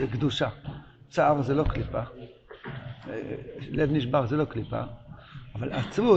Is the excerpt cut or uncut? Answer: uncut